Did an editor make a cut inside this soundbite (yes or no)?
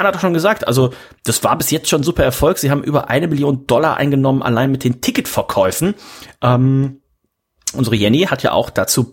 no